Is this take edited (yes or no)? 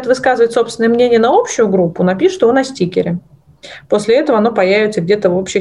no